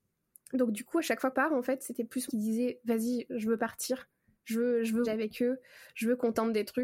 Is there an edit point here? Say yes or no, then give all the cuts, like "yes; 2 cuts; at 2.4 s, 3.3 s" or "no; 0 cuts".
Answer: yes; 3 cuts; at 1.3 s, 2.3 s, 5.0 s